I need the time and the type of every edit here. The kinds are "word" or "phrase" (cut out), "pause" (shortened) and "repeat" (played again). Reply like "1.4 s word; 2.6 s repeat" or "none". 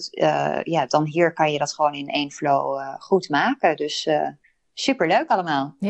none